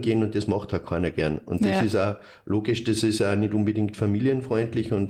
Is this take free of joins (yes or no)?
yes